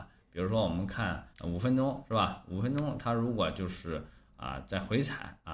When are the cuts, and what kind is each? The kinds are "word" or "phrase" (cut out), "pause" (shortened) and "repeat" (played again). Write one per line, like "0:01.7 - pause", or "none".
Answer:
0:01.3 - pause